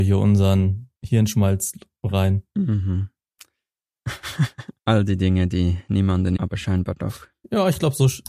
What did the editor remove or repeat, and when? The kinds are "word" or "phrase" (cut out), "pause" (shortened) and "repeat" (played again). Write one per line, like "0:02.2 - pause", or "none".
0:01.0 - pause
0:04.8 - pause
0:06.4 - word